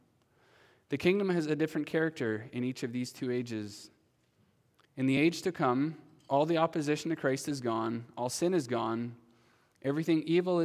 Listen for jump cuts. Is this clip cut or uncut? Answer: uncut